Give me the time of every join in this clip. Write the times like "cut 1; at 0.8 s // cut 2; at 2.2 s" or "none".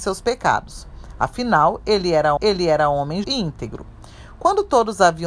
cut 1; at 2.4 s // cut 2; at 3.2 s